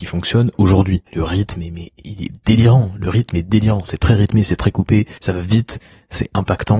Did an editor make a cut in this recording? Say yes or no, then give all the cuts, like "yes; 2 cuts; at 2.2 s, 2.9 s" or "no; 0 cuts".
yes; 2 cuts; at 1.1 s, 5.2 s